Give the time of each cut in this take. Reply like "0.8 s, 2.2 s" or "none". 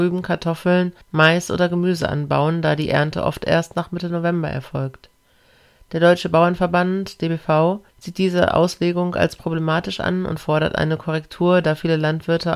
1.0 s, 7.9 s